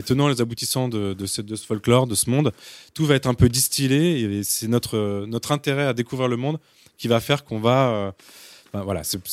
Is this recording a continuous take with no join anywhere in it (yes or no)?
yes